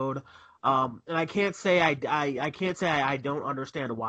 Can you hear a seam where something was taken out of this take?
no; 0 cuts

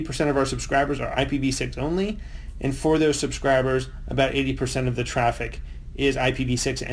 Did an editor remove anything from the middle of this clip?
no; 0 cuts

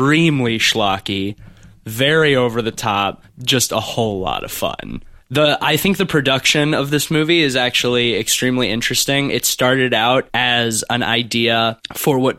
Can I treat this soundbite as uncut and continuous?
yes; 0 cuts

